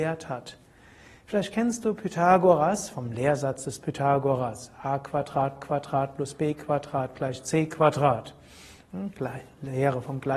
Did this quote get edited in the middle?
yes; 1 cut; at 5.6 s

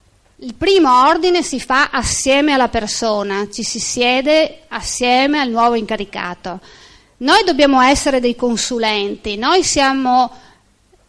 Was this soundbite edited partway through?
no; 0 cuts

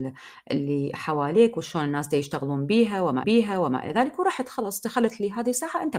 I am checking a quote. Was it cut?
yes; 1 cut; at 3.2 s

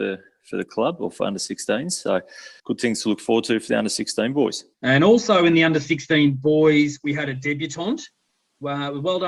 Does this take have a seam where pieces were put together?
yes; 2 cuts; at 2.6 s, 4.7 s

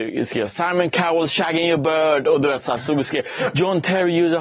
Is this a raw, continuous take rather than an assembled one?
yes; 0 cuts

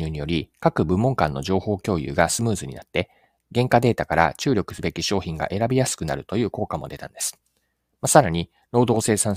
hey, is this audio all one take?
yes; 0 cuts

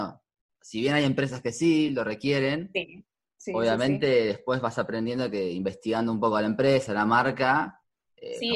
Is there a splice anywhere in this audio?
no; 0 cuts

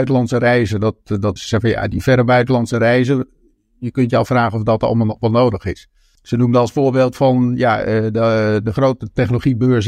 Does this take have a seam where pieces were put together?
yes; 1 cut; at 1.4 s

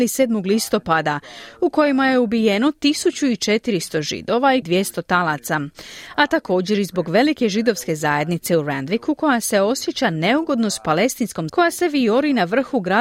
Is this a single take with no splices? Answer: no; 2 cuts; at 4.6 s, 11.5 s

